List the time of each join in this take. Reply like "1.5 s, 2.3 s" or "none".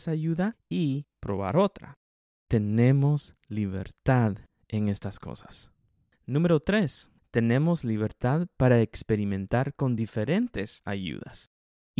none